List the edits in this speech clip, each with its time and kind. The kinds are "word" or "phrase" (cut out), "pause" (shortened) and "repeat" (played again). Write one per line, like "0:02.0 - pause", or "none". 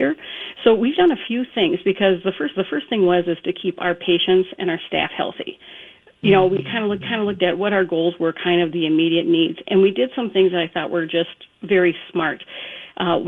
0:02.5 - repeat
0:07.0 - repeat
0:11.5 - pause